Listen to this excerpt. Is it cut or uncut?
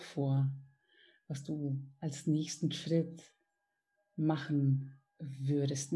uncut